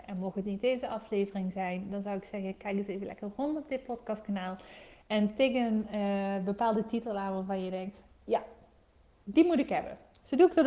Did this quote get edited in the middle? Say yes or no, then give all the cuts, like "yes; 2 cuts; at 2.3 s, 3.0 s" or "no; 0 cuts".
no; 0 cuts